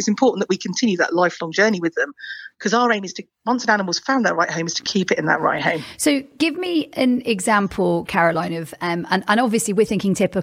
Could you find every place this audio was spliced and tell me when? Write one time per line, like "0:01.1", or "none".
none